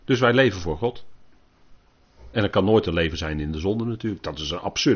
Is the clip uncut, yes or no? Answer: yes